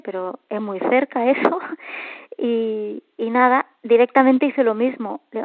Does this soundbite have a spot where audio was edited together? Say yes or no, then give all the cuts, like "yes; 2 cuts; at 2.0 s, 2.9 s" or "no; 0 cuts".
no; 0 cuts